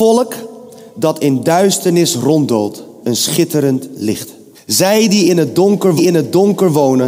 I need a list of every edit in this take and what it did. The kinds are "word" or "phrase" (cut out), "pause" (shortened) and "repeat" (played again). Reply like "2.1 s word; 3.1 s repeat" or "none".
3.0 s word; 4.5 s pause; 6.0 s repeat